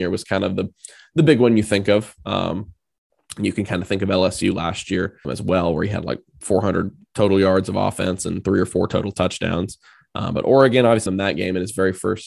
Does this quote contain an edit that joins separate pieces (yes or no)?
yes